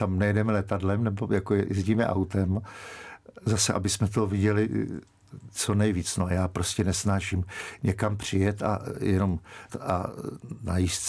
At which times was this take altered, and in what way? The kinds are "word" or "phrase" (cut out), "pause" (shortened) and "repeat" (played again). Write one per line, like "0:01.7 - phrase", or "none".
0:09.7 - word